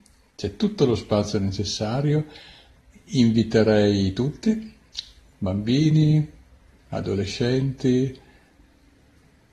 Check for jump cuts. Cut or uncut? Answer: uncut